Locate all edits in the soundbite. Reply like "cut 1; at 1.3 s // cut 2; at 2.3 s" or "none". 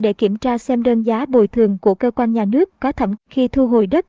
cut 1; at 3.2 s